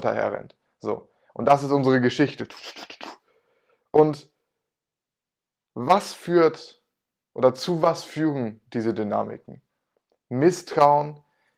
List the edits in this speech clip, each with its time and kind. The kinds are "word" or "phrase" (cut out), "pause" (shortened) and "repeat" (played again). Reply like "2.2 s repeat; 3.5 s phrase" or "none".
none